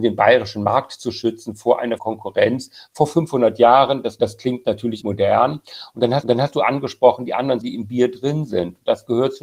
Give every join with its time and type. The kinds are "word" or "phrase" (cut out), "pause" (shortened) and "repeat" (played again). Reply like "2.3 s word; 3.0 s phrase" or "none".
2.0 s word; 4.2 s phrase; 5.0 s phrase; 6.2 s repeat; 7.6 s word